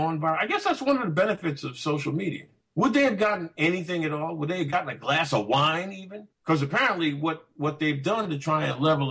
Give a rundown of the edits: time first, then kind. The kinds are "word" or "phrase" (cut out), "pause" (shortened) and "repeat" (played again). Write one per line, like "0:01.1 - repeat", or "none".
0:02.6 - pause
0:06.3 - pause

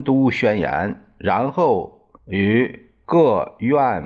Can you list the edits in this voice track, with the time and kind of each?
0:02.2 - pause

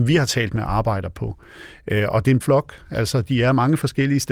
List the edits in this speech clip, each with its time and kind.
0:02.4 - word

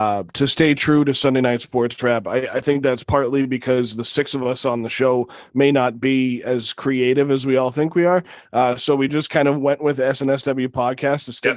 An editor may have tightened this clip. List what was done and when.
none

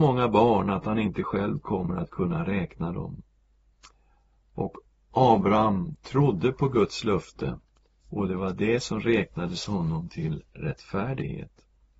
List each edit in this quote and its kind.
none

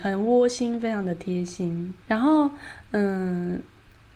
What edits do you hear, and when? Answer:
0:02.0 - word

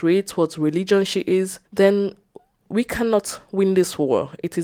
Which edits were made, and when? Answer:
0:01.7 - pause

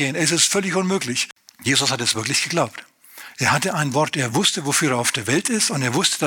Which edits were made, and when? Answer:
none

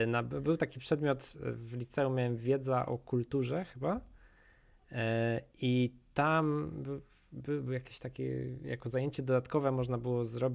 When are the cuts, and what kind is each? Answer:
none

